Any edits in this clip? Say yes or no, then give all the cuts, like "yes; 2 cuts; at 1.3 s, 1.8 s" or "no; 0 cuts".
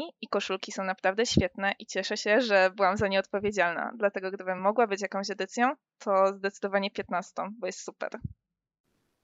no; 0 cuts